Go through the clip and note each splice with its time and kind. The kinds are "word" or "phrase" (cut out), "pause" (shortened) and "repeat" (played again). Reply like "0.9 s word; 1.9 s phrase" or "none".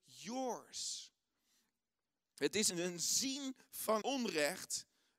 2.7 s word; 4.0 s word